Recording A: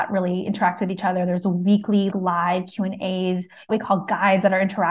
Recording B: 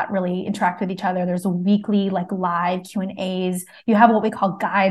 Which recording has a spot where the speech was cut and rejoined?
A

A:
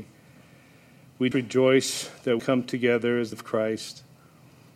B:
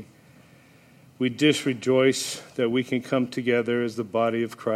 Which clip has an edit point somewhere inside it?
A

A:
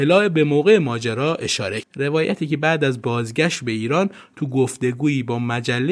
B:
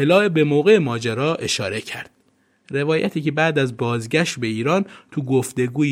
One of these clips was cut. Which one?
A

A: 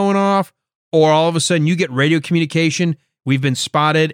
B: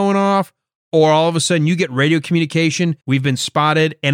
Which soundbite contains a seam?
B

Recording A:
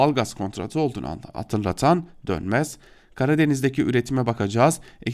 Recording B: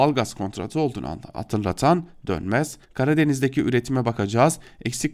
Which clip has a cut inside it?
B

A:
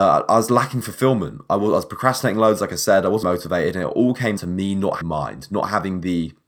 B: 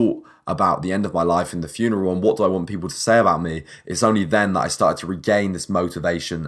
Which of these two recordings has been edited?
A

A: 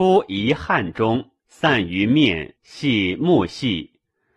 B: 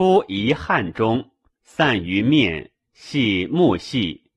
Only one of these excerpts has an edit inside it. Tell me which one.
A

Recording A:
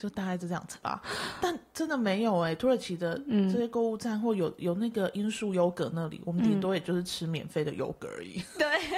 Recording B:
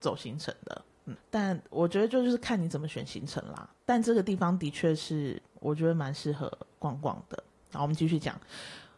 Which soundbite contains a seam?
B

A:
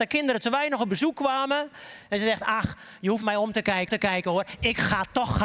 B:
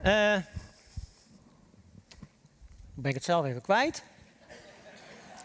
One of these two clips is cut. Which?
A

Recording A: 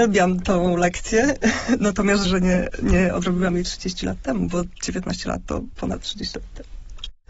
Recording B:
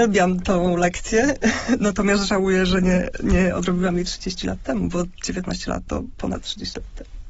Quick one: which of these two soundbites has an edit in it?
A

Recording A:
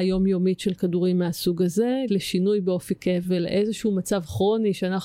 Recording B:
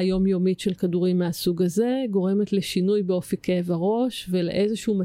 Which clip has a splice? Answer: A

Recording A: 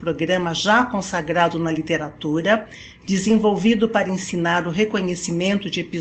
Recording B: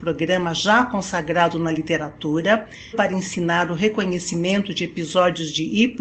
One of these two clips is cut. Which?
B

